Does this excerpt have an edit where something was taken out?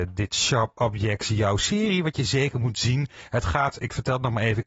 no; 0 cuts

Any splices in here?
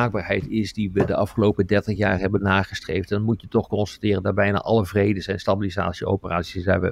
no; 0 cuts

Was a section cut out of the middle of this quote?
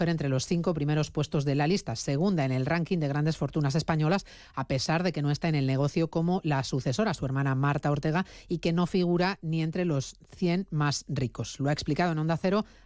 no; 0 cuts

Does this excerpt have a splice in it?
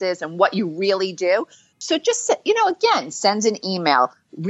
no; 0 cuts

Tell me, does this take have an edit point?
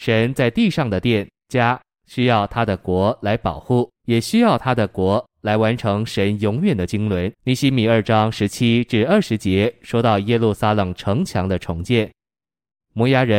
yes; 3 cuts; at 1.4 s, 4.0 s, 7.3 s

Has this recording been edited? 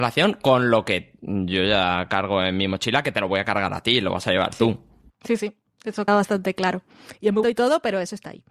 yes; 2 cuts; at 6.1 s, 7.4 s

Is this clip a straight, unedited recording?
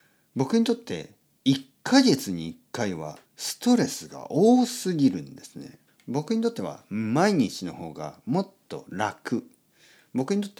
no; 2 cuts; at 3.2 s, 5.9 s

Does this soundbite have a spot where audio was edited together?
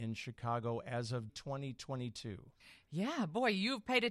yes; 1 cut; at 1.3 s

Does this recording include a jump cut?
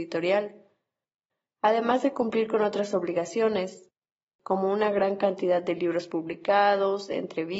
no; 0 cuts

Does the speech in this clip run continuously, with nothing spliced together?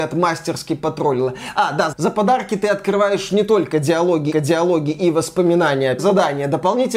no; 3 cuts; at 1.9 s, 4.3 s, 6.0 s

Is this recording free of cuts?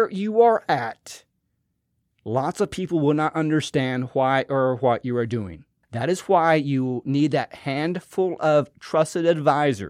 yes; 0 cuts

